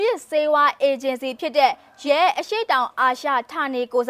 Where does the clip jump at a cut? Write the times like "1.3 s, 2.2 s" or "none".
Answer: 2.1 s

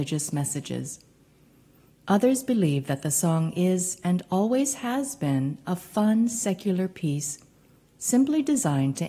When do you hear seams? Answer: none

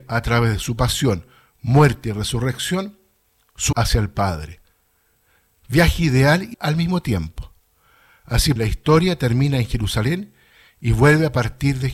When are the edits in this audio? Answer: 3.7 s, 6.5 s, 8.6 s

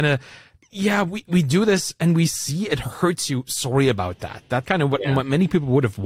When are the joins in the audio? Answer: 1.3 s, 4.6 s

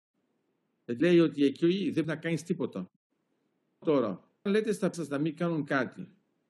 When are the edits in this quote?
1.0 s, 2.0 s, 3.8 s, 4.5 s, 4.9 s

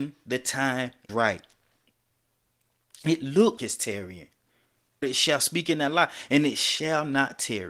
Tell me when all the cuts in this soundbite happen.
1.1 s, 3.6 s, 5.0 s

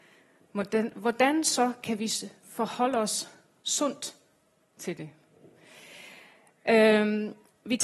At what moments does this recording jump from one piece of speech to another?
none

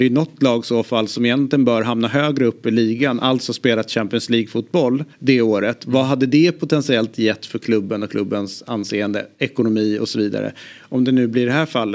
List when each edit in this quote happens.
5.1 s

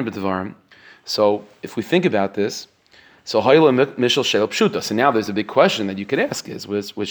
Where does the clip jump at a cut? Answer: none

